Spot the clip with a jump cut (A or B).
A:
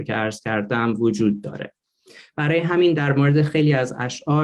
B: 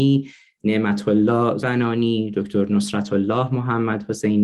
B